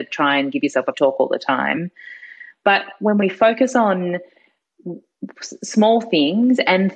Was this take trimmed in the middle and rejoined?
yes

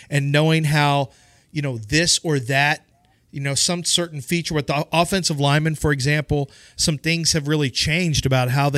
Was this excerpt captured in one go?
yes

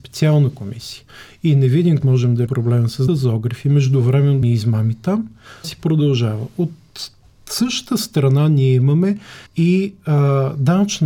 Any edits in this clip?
yes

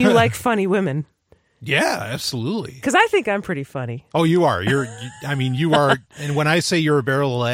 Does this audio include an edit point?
no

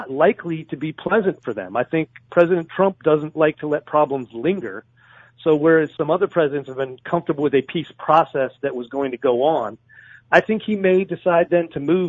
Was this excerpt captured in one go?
yes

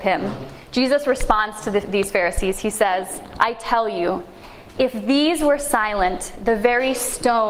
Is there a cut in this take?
no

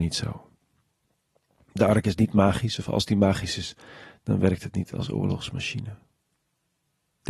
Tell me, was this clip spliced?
no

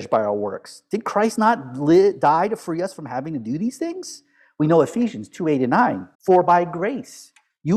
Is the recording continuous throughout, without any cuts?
no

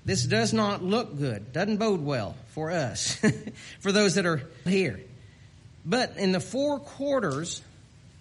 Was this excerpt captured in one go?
no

